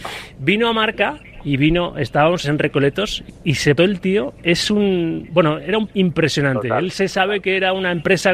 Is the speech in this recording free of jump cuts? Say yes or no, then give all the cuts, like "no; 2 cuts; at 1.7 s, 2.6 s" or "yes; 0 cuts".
no; 4 cuts; at 2.4 s, 3.3 s, 3.8 s, 5.9 s